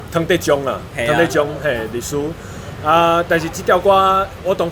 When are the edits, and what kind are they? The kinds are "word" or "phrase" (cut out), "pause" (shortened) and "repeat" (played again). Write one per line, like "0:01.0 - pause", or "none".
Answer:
none